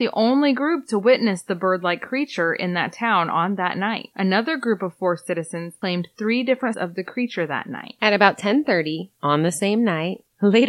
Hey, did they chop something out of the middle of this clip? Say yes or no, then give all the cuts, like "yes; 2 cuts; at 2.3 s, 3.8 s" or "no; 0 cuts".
yes; 1 cut; at 6.7 s